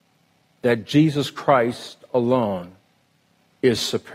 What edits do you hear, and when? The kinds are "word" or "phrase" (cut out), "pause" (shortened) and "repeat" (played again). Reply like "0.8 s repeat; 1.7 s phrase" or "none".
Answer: none